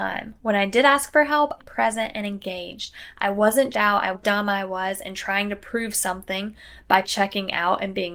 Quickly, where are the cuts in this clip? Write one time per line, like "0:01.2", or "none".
0:01.6
0:03.7
0:04.1
0:07.0